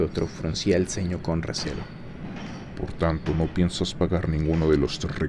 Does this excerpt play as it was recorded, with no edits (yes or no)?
yes